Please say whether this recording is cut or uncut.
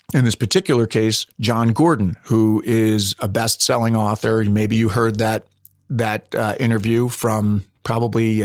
uncut